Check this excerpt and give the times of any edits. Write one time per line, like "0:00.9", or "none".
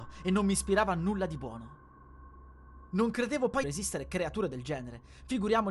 0:03.6